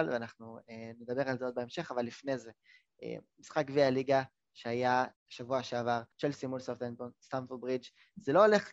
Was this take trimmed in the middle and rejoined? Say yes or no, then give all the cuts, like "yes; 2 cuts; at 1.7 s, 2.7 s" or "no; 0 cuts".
yes; 2 cuts; at 5.2 s, 6.1 s